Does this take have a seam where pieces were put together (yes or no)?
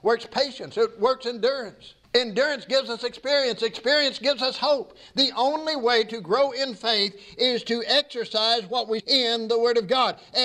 yes